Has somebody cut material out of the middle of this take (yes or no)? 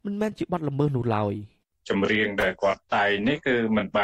no